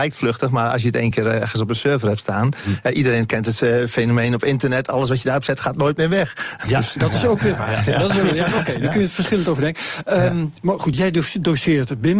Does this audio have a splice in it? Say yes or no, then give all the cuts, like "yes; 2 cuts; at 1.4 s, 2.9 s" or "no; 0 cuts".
no; 0 cuts